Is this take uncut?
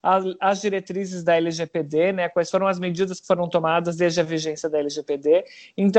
yes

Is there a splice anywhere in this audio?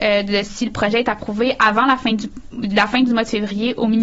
no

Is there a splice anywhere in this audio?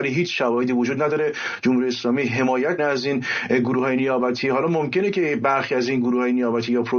yes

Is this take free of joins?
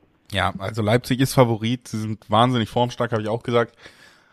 yes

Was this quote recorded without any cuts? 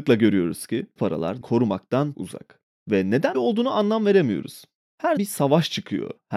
no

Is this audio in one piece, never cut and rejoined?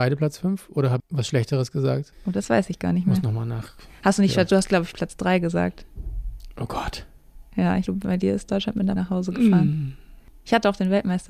no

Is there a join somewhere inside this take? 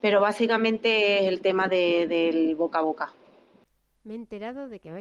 no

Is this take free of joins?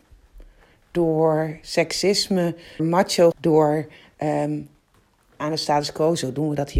no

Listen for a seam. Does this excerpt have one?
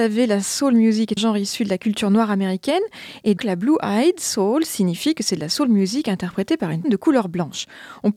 yes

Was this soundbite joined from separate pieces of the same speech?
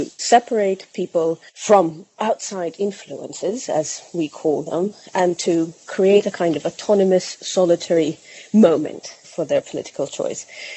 yes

